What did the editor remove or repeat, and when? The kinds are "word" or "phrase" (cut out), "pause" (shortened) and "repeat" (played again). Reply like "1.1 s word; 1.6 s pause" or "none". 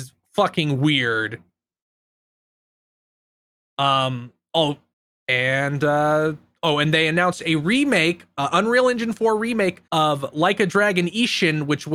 4.9 s pause; 9.9 s pause

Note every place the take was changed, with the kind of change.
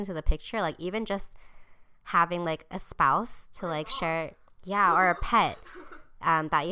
none

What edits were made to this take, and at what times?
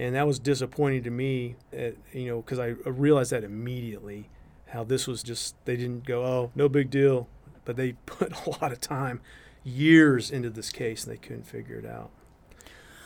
1.7 s word; 5.2 s word

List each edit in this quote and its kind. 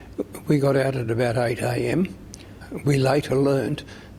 none

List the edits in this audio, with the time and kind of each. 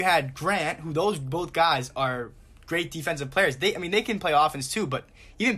none

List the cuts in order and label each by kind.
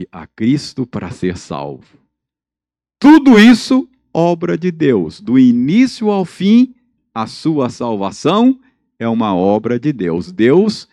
none

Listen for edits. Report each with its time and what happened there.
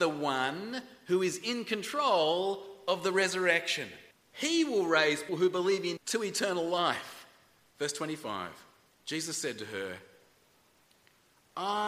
4.1 s pause; 5.3 s word; 6.0 s word; 8.9 s pause

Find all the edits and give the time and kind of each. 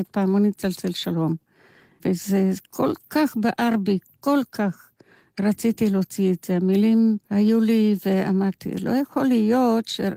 7.2 s pause

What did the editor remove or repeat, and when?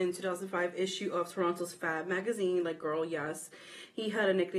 none

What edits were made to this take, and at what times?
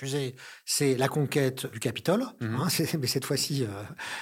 none

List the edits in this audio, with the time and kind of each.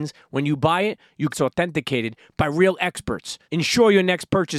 1.3 s phrase; 3.4 s pause

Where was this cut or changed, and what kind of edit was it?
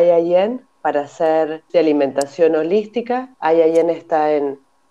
1.7 s word; 3.3 s pause

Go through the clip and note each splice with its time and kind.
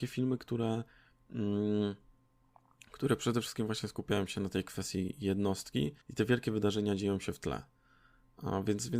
6.0 s pause

